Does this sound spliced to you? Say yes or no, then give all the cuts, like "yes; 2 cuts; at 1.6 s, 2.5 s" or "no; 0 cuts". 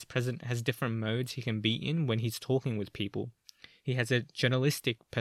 no; 0 cuts